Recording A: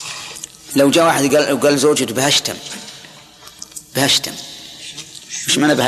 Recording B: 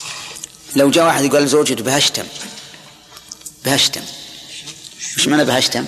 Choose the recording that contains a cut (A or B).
B